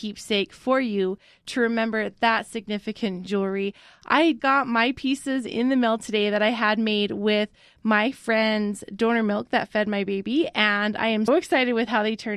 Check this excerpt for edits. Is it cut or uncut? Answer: cut